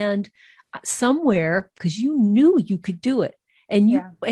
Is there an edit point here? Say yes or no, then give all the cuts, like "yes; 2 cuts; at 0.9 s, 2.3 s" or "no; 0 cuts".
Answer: yes; 1 cut; at 1.8 s